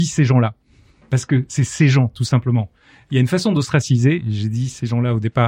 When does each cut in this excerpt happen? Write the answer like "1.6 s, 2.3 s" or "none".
none